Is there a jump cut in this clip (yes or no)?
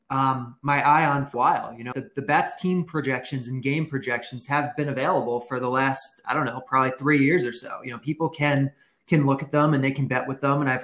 yes